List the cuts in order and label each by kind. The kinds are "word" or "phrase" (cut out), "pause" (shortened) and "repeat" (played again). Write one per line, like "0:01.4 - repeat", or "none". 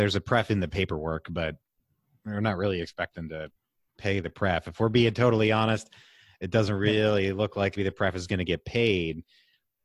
0:07.8 - word